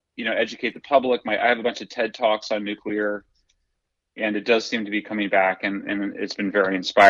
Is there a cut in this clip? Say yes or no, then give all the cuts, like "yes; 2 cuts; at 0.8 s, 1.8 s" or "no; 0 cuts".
no; 0 cuts